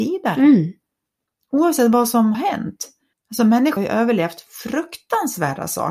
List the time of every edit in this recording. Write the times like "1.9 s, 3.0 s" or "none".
2.3 s, 3.1 s, 3.8 s